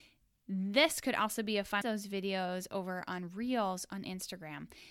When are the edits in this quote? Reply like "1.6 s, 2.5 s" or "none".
1.8 s